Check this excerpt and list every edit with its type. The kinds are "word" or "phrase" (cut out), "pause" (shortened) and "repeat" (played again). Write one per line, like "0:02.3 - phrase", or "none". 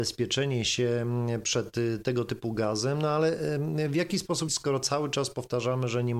0:04.5 - phrase